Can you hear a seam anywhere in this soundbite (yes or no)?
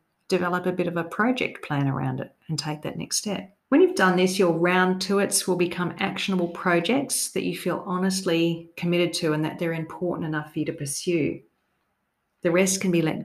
yes